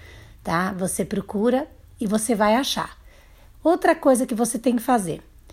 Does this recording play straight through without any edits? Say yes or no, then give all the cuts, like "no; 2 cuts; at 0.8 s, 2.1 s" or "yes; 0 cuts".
yes; 0 cuts